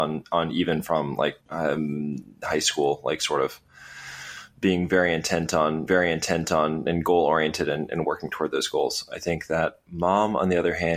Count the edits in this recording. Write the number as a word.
two